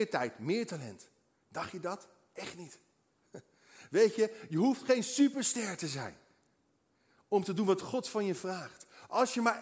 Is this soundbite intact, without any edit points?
yes; 0 cuts

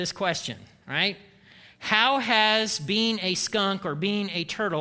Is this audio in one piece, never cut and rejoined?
yes; 0 cuts

